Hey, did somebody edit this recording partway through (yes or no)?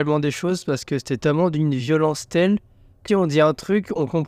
yes